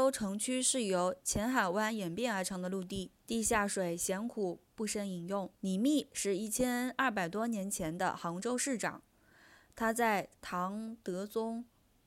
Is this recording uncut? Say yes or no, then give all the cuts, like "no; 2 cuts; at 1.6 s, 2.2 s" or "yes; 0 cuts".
no; 3 cuts; at 3.2 s, 5.6 s, 10.3 s